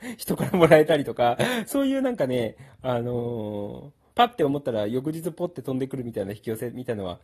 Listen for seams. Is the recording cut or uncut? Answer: cut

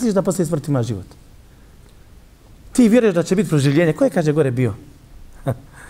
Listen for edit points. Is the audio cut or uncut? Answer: uncut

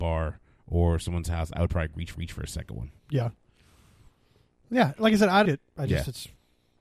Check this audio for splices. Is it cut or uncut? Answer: cut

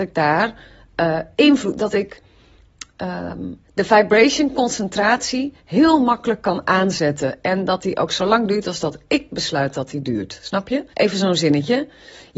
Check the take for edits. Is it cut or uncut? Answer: cut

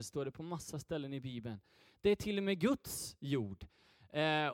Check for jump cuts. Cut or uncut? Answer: uncut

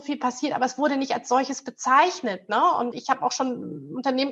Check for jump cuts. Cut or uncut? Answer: cut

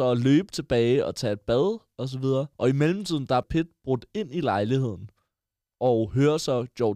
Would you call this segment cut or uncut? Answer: cut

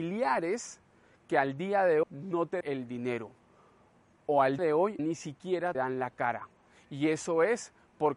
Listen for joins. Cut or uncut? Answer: cut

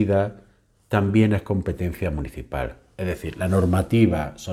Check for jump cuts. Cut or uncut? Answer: uncut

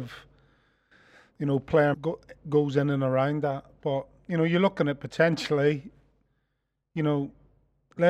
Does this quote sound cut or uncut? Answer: cut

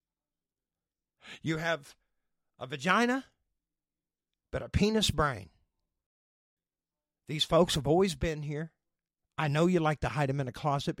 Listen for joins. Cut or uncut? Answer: uncut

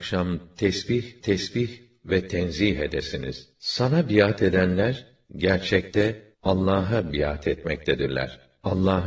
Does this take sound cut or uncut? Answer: cut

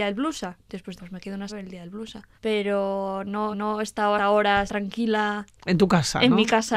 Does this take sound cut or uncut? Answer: cut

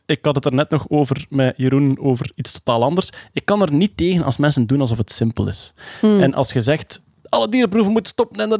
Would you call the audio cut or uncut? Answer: uncut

